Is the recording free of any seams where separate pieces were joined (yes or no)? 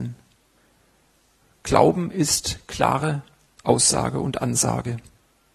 yes